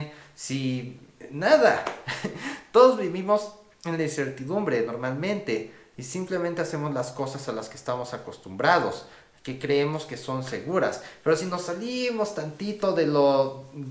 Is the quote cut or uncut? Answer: uncut